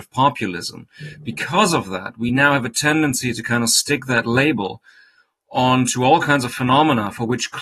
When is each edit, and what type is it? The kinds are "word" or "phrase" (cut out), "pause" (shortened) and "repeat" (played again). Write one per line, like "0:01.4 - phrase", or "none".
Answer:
none